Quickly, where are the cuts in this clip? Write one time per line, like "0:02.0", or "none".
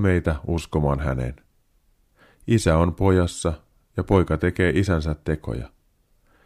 none